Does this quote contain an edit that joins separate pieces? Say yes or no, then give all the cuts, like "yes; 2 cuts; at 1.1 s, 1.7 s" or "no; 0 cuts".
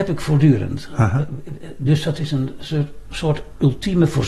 no; 0 cuts